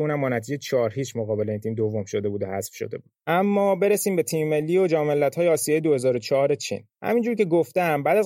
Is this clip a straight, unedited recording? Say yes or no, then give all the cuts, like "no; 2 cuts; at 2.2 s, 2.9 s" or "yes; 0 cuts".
no; 2 cuts; at 3.2 s, 6.9 s